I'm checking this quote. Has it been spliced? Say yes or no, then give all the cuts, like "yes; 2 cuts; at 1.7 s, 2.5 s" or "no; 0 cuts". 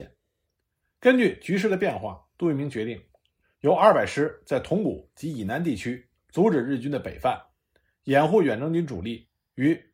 yes; 1 cut; at 6.2 s